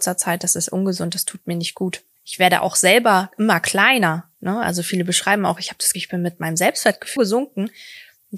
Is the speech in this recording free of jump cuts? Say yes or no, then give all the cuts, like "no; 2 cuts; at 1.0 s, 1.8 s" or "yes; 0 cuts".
no; 3 cuts; at 2.2 s, 5.9 s, 7.2 s